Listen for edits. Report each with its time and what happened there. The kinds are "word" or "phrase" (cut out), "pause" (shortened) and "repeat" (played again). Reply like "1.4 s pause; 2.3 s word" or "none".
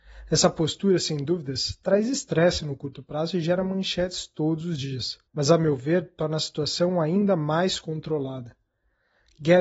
5.3 s pause